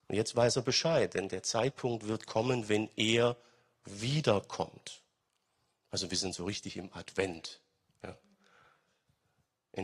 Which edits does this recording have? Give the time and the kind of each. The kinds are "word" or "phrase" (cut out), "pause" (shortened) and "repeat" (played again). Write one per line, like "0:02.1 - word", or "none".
none